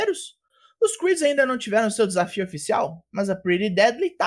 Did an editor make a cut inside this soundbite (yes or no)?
no